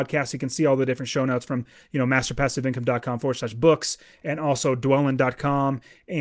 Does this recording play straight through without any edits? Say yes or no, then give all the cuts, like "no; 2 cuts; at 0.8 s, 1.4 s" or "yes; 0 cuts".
yes; 0 cuts